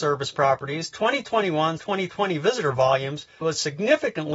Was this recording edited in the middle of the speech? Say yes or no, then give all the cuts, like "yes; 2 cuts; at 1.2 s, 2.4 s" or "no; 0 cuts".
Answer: yes; 2 cuts; at 1.8 s, 3.4 s